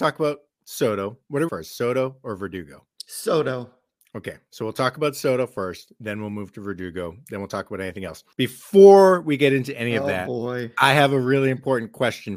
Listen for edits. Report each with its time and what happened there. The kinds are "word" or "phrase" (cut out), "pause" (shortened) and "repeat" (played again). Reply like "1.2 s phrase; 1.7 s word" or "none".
1.5 s phrase; 2.9 s pause; 8.3 s pause